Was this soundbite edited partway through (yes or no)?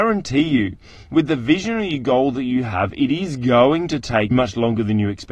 yes